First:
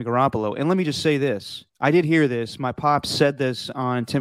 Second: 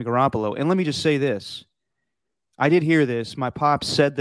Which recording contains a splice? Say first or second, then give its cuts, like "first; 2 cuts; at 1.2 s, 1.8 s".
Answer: first; 1 cut; at 1.7 s